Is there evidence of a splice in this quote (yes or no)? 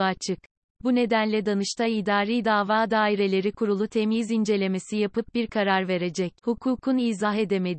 yes